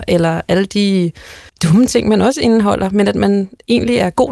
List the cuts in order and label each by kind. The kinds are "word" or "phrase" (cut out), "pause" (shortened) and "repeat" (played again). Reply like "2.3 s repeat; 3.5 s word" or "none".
1.5 s pause